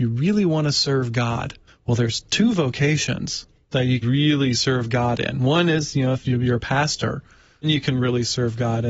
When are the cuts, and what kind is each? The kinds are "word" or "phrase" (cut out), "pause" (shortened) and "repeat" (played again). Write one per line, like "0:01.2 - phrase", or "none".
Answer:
0:01.7 - pause
0:04.0 - word
0:07.6 - word